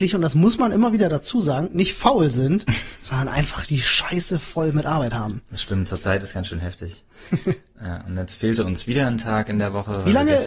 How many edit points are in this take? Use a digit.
0